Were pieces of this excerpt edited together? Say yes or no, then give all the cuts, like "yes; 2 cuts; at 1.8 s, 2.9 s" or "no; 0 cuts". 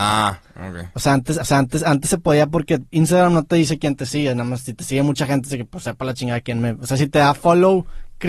yes; 2 cuts; at 1.4 s, 2.9 s